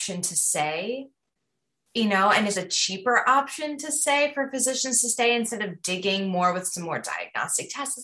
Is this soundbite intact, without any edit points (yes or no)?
no